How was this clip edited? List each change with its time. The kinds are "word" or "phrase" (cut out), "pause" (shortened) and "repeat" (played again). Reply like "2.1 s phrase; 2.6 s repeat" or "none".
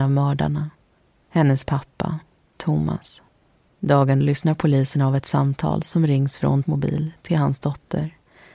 4.2 s word; 6.6 s word